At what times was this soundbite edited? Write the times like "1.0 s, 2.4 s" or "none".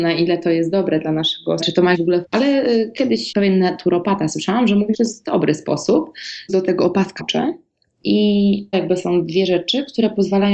1.6 s, 1.9 s, 2.3 s, 3.3 s, 4.9 s, 6.5 s, 7.2 s, 8.7 s